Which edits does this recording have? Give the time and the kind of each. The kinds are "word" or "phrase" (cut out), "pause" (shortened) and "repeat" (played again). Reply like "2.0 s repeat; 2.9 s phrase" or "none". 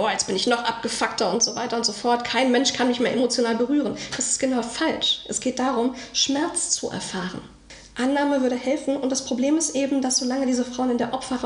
none